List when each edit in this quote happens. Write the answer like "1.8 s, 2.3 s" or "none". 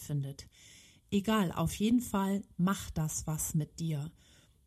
none